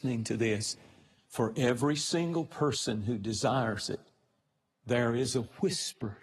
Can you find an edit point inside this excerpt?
no; 0 cuts

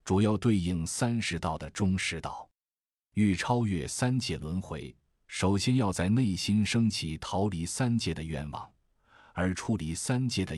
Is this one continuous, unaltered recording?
yes; 0 cuts

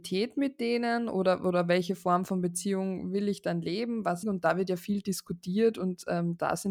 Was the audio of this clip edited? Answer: yes; 1 cut; at 4.2 s

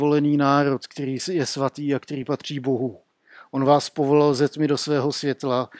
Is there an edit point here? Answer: no; 0 cuts

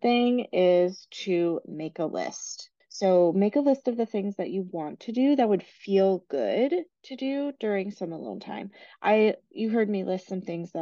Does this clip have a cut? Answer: yes; 1 cut; at 2.8 s

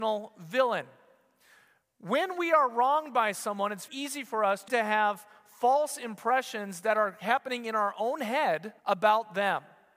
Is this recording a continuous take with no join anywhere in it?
no; 3 cuts; at 3.9 s, 4.7 s, 8.8 s

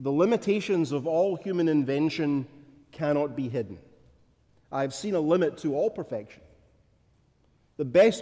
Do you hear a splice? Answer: no; 0 cuts

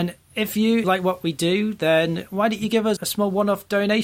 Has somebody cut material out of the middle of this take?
yes; 1 cut; at 3.0 s

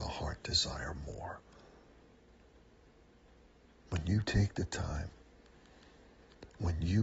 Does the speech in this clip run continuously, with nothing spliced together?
yes; 0 cuts

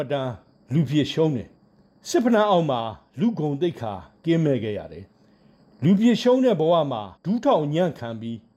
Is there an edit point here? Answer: yes; 3 cuts; at 1.6 s, 5.1 s, 7.2 s

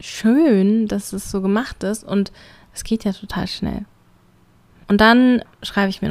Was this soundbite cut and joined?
no; 0 cuts

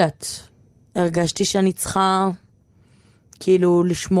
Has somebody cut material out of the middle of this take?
no; 0 cuts

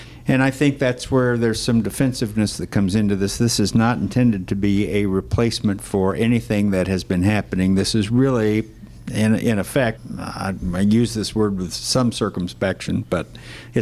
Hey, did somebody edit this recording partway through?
no; 0 cuts

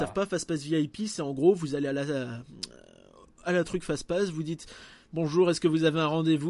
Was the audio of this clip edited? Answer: no; 0 cuts

